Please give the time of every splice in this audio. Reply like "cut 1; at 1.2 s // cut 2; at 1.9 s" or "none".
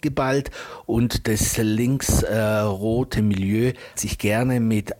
cut 1; at 3.2 s // cut 2; at 3.9 s